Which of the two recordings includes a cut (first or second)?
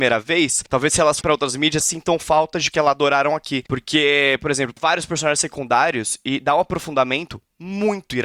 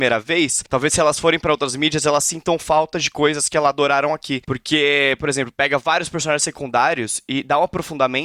first